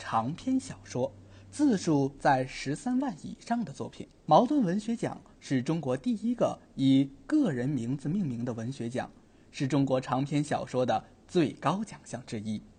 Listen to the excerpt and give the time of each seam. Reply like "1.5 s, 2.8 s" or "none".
4.2 s

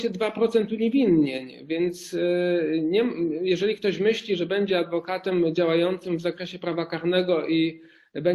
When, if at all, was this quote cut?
none

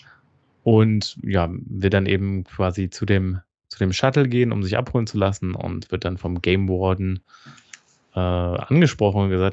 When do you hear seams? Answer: none

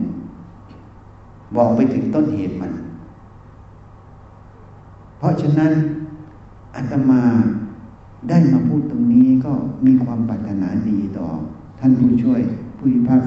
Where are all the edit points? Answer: none

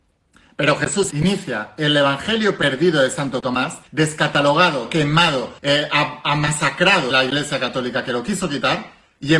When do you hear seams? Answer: 1.1 s, 3.9 s, 5.6 s, 7.1 s

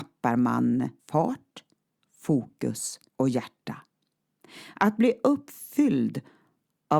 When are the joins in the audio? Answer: 1.0 s, 3.1 s

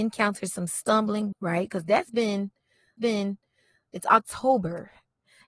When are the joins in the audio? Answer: 1.3 s, 3.0 s

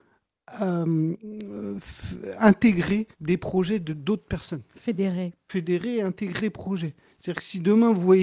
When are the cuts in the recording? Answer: 3.1 s, 4.7 s, 6.4 s

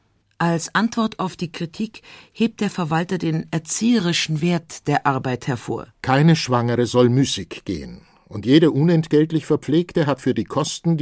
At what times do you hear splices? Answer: 5.9 s

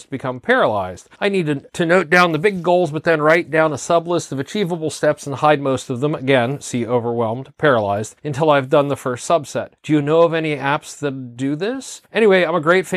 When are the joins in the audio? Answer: 1.1 s, 1.7 s, 8.2 s, 9.8 s, 12.0 s

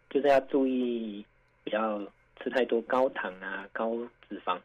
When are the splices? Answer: none

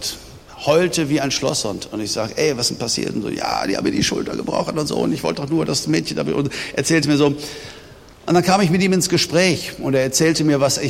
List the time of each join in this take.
none

